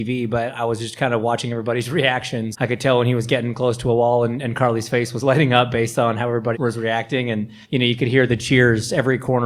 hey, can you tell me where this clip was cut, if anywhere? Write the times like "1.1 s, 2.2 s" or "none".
2.5 s, 6.5 s, 7.6 s, 8.3 s